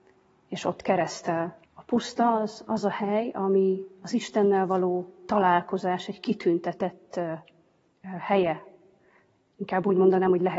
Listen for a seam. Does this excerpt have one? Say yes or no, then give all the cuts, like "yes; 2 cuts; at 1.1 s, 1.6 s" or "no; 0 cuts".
yes; 1 cut; at 1.6 s